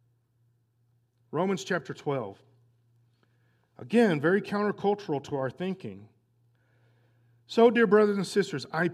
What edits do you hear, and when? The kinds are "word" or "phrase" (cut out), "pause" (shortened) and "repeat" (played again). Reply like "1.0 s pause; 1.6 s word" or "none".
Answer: none